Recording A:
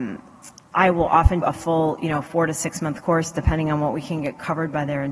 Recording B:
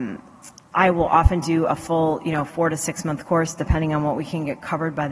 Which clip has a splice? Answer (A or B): A